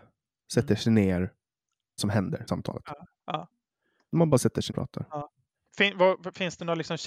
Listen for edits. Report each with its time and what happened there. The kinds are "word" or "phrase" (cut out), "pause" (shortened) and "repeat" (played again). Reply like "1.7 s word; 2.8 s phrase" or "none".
2.0 s word; 2.5 s word; 4.7 s word